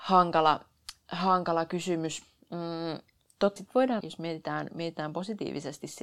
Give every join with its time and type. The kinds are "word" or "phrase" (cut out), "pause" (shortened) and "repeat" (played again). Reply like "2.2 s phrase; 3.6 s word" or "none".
3.6 s word; 4.0 s word